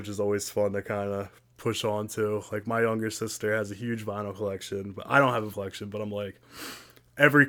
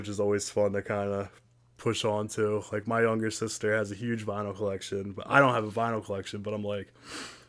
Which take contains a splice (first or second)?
first